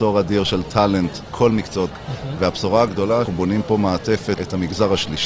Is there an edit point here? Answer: yes; 4 cuts; at 1.3 s, 1.9 s, 3.3 s, 4.4 s

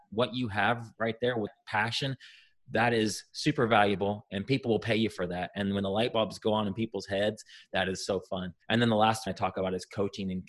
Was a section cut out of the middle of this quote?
yes; 3 cuts; at 1.5 s, 8.6 s, 9.3 s

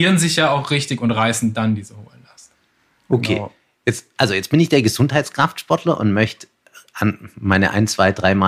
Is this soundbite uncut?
yes; 0 cuts

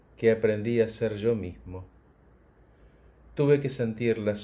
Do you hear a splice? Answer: no; 0 cuts

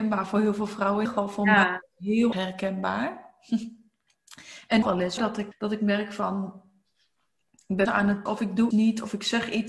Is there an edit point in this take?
yes; 8 cuts; at 1.1 s, 2.3 s, 4.8 s, 5.2 s, 5.5 s, 7.9 s, 8.3 s, 8.7 s

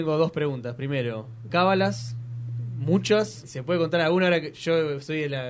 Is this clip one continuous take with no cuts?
no; 2 cuts; at 1.5 s, 3.4 s

